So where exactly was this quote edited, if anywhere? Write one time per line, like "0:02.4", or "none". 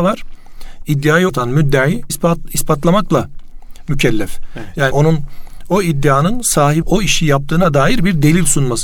0:01.3
0:02.1
0:04.9
0:06.8